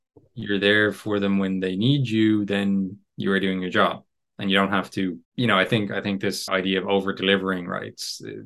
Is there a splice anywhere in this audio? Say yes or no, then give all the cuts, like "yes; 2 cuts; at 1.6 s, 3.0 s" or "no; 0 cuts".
yes; 2 cuts; at 5.2 s, 6.5 s